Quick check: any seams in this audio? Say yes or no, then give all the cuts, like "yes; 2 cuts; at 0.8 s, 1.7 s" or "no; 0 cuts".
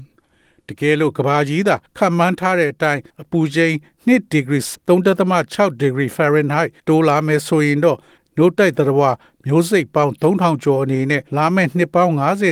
yes; 5 cuts; at 1.9 s, 3.1 s, 4.7 s, 6.8 s, 11.3 s